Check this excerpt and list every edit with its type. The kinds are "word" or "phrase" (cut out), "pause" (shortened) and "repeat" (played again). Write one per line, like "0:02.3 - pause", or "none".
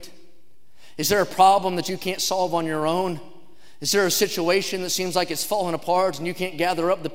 none